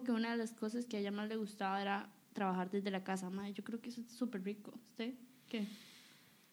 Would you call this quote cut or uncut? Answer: uncut